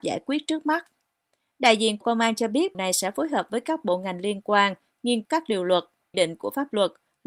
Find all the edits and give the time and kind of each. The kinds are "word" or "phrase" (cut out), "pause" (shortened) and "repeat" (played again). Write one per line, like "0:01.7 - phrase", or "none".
0:02.0 - word
0:02.7 - word
0:05.2 - word
0:06.1 - word